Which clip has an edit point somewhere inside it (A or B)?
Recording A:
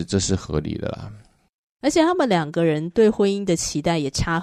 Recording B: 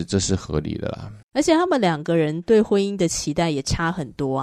B